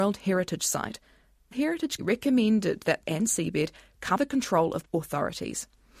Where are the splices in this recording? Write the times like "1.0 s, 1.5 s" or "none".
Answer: 1.5 s, 2.0 s, 3.0 s, 4.2 s, 4.9 s